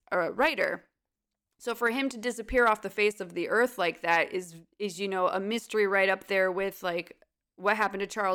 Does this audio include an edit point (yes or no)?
no